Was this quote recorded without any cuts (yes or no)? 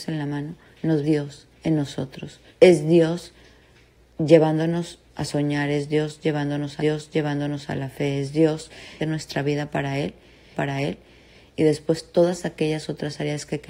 no